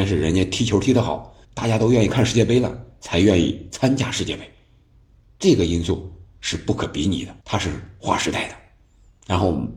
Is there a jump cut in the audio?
yes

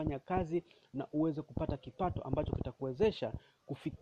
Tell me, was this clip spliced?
no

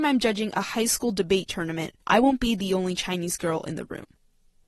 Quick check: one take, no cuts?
no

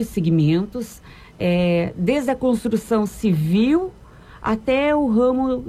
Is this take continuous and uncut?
yes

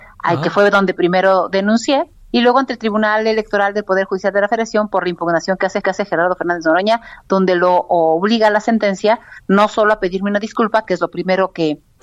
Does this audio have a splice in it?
yes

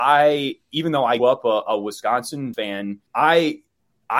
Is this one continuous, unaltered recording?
no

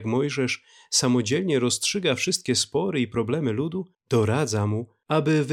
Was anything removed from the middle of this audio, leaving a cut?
yes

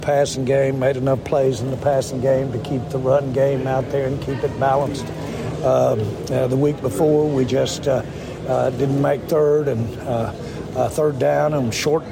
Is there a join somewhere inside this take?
no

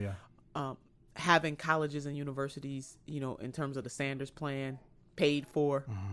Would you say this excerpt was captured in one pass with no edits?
yes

